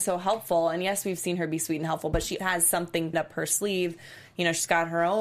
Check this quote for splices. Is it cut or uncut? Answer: cut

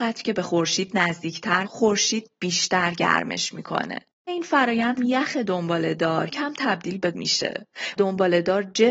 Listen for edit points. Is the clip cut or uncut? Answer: cut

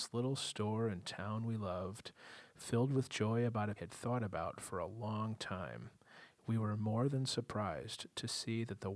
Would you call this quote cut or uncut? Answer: cut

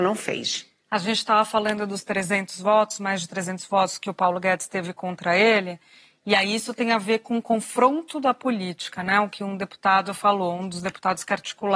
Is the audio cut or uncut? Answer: uncut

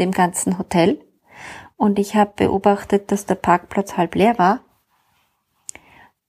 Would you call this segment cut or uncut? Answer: uncut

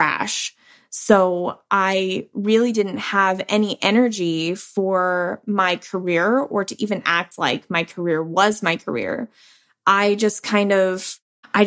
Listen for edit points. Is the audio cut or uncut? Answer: uncut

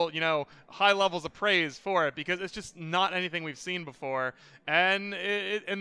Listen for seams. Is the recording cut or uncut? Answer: uncut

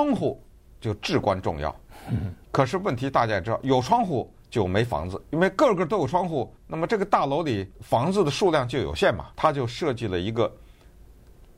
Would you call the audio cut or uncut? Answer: cut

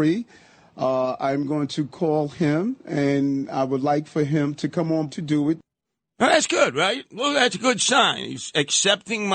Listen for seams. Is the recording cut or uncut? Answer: cut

